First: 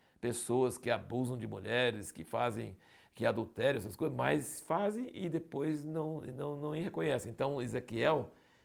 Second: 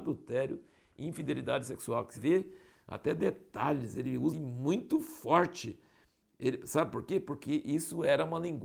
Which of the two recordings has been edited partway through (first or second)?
second